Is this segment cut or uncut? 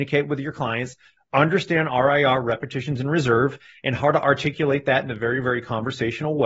uncut